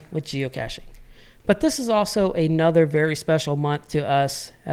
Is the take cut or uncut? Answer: uncut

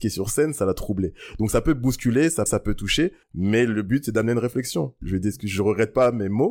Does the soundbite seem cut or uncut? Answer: cut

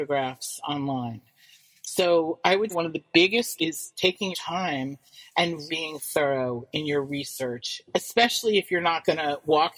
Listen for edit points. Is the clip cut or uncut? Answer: cut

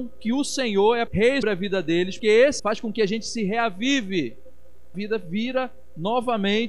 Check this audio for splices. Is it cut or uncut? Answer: cut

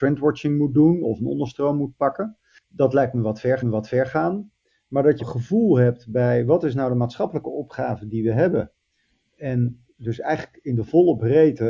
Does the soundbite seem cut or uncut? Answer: cut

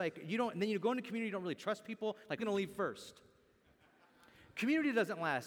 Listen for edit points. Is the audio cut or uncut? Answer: cut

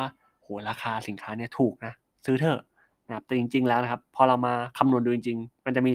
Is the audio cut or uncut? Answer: uncut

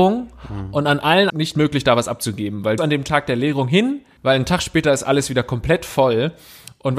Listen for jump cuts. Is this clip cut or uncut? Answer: cut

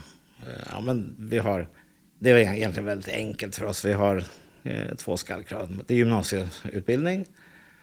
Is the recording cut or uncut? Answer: cut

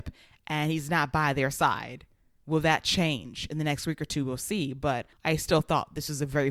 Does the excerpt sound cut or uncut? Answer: uncut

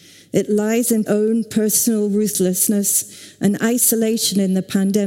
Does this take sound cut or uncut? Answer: cut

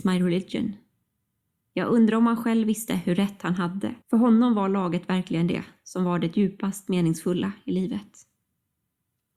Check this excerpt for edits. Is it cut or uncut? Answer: cut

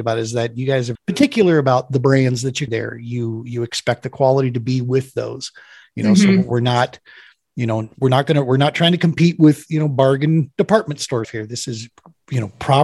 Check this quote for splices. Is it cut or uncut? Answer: cut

